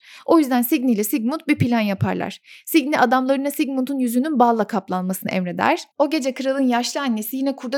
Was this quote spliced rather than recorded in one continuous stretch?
yes; 1 cut; at 5.9 s

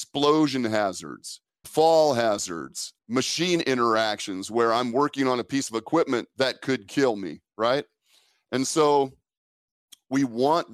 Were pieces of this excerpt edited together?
yes; 3 cuts; at 1.6 s, 3.0 s, 6.3 s

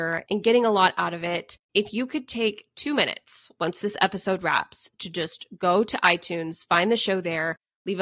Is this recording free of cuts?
no; 1 cut; at 1.6 s

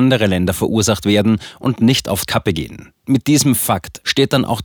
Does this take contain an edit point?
yes; 1 cut; at 2.3 s

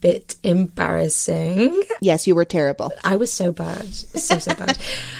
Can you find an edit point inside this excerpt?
no; 0 cuts

